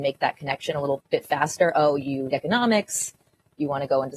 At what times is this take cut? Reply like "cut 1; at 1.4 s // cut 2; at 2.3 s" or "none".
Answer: cut 1; at 2.3 s